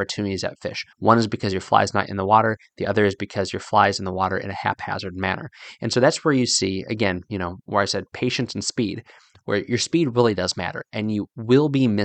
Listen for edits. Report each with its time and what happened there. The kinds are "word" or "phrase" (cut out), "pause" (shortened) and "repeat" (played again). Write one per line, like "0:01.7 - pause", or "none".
0:00.9 - pause